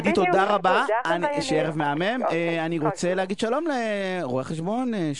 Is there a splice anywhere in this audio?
no; 0 cuts

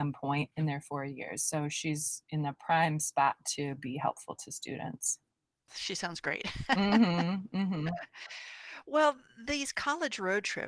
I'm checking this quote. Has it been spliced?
no; 0 cuts

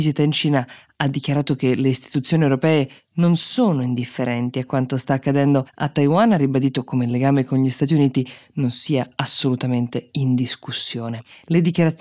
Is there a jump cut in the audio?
yes; 1 cut; at 5.7 s

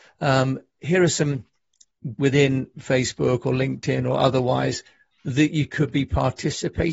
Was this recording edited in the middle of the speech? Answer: yes; 1 cut; at 2.1 s

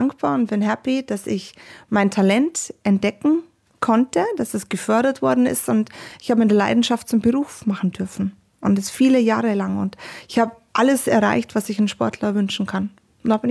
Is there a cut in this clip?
no; 0 cuts

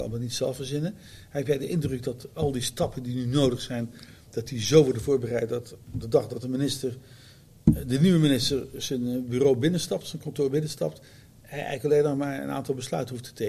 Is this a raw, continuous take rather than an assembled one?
yes; 0 cuts

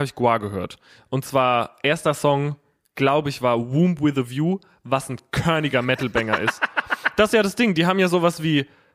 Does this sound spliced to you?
no; 0 cuts

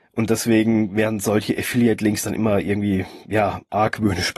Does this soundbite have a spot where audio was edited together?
no; 0 cuts

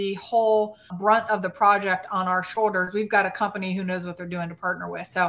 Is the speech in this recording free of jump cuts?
no; 1 cut; at 0.9 s

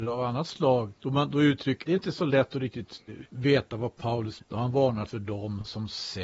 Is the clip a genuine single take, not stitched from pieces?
no; 5 cuts; at 1.0 s, 1.9 s, 3.3 s, 4.4 s, 5.1 s

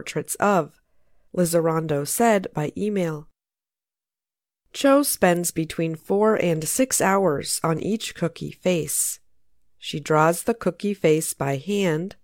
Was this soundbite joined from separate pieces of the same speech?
no; 0 cuts

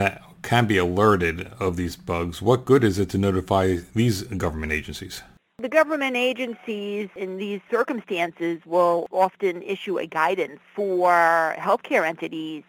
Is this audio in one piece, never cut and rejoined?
yes; 0 cuts

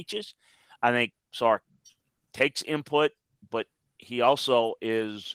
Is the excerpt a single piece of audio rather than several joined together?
yes; 0 cuts

